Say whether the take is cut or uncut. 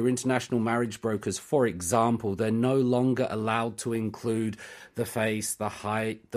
uncut